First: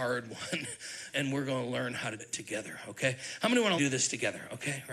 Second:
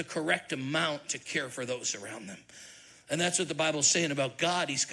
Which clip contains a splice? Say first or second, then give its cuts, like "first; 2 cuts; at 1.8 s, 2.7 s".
first; 3 cuts; at 1.1 s, 2.2 s, 3.8 s